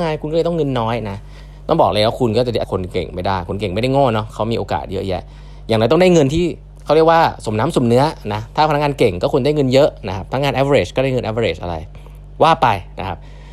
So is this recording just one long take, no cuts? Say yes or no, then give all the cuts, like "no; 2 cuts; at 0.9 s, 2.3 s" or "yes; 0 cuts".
no; 1 cut; at 2.6 s